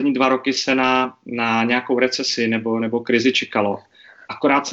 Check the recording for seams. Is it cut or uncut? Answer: uncut